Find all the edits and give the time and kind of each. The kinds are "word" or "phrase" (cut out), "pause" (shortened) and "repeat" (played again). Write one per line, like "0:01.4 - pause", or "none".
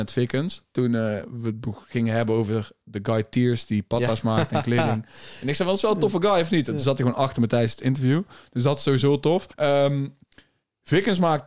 0:09.5 - pause